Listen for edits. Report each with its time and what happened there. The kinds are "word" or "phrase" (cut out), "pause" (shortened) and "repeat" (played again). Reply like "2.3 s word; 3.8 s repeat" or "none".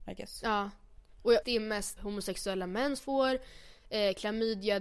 1.4 s word; 2.0 s word; 3.0 s word